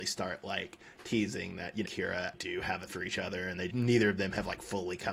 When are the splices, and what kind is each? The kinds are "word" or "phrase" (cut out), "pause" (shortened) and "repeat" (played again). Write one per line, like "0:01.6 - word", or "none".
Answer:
0:01.8 - phrase
0:02.3 - word
0:02.9 - word
0:03.7 - word